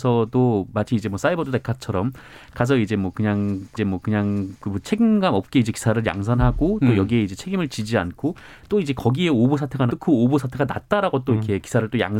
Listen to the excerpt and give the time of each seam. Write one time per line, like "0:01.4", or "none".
0:03.8
0:09.9